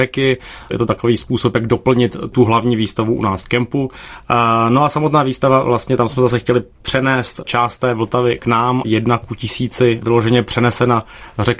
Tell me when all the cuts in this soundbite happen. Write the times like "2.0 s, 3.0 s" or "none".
8.8 s